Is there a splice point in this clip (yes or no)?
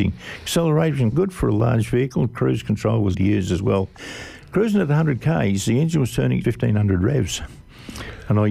yes